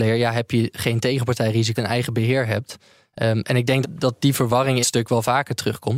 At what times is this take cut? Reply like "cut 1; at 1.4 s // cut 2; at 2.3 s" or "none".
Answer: cut 1; at 1.8 s // cut 2; at 3.8 s // cut 3; at 4.8 s